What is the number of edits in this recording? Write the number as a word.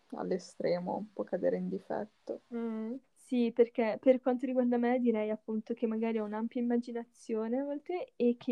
one